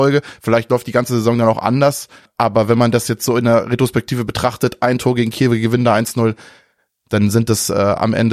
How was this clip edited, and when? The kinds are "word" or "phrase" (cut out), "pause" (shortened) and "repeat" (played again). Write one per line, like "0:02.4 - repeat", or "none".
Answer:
none